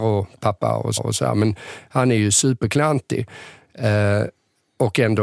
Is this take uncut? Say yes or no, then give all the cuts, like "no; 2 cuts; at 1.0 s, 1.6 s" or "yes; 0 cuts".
no; 1 cut; at 1.0 s